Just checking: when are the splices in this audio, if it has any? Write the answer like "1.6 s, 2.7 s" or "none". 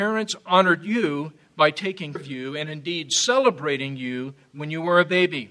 2.2 s